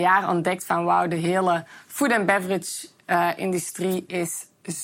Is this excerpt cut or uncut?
uncut